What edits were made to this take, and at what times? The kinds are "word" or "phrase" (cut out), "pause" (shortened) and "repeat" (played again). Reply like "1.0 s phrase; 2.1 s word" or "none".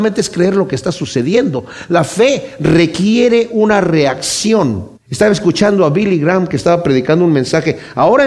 5.0 s pause